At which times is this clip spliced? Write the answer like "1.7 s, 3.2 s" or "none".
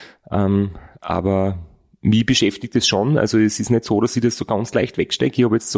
none